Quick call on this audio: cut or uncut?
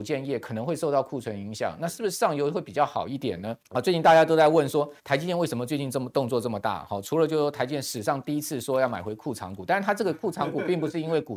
cut